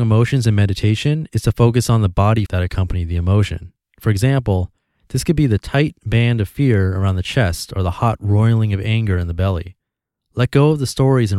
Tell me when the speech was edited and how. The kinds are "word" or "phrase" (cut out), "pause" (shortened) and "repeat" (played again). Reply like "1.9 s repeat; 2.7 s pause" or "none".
2.5 s word